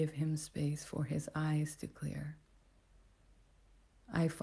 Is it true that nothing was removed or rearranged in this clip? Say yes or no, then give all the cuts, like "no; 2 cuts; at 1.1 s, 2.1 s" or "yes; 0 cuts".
yes; 0 cuts